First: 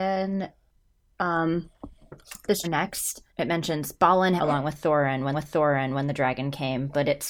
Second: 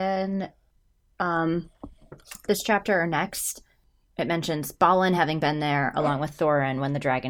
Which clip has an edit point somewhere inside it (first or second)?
first